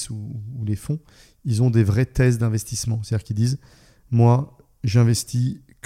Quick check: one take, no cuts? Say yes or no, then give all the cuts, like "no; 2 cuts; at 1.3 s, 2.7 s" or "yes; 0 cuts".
yes; 0 cuts